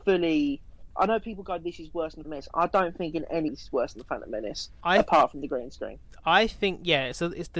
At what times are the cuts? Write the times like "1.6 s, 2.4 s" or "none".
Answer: 2.2 s, 3.5 s